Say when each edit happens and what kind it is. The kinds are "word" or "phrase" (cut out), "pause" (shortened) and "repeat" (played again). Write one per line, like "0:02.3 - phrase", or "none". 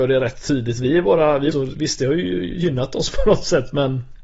0:01.5 - phrase